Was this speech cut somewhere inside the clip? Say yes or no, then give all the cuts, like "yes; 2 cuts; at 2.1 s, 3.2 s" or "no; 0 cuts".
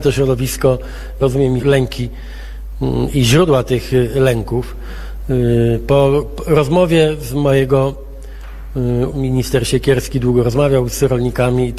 yes; 3 cuts; at 1.2 s, 1.6 s, 9.1 s